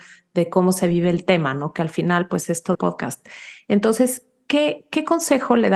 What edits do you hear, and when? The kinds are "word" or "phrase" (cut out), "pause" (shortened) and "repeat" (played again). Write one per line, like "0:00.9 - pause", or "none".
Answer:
0:02.7 - phrase